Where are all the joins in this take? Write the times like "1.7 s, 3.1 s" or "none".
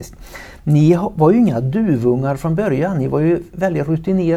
none